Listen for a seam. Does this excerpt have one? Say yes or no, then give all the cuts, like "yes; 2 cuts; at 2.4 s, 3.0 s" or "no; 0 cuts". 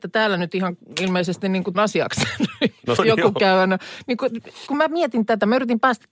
yes; 3 cuts; at 1.7 s, 3.0 s, 4.7 s